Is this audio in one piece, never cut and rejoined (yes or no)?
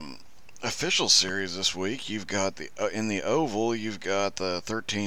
yes